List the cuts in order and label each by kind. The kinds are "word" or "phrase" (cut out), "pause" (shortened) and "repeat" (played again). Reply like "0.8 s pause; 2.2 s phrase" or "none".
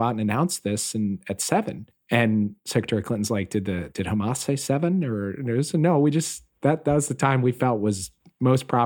1.9 s pause